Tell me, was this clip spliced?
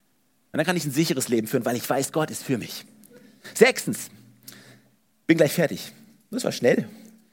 no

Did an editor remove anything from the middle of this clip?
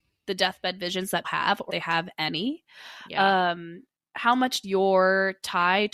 yes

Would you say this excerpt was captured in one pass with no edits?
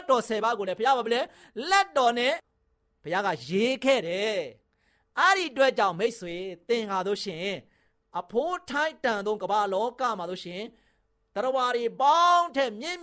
yes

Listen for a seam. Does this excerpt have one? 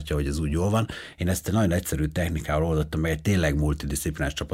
no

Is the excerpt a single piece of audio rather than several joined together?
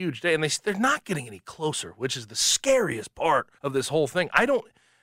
no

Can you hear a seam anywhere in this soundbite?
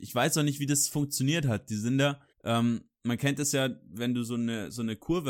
yes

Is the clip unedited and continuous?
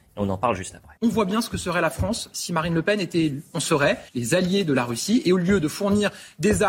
no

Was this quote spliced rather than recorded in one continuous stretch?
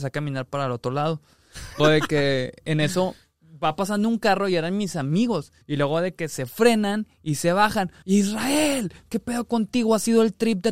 yes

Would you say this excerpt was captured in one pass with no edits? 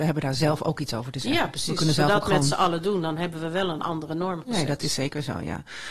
yes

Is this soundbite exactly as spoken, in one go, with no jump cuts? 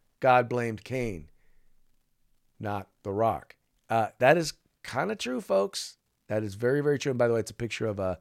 yes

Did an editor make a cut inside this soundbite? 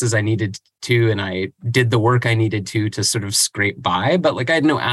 no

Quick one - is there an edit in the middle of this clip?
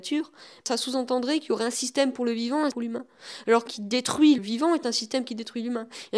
yes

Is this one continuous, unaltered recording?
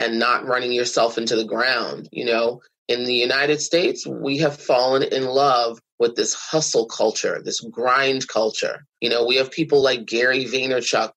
yes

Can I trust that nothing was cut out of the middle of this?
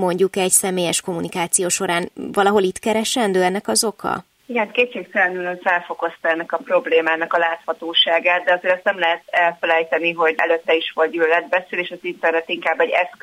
no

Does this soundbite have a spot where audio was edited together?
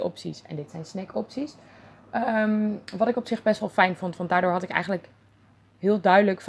no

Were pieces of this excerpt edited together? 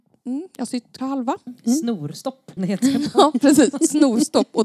yes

